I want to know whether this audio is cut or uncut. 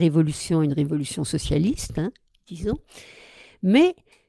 uncut